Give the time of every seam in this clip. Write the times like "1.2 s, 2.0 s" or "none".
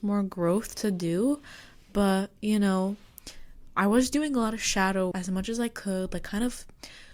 5.1 s